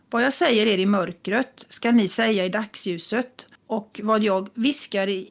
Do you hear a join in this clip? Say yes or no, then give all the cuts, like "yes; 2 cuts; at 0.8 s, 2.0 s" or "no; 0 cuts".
yes; 1 cut; at 3.6 s